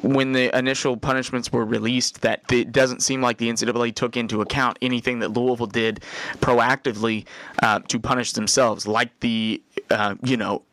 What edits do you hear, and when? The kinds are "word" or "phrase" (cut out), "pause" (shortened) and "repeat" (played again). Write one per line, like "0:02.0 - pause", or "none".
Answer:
0:02.4 - phrase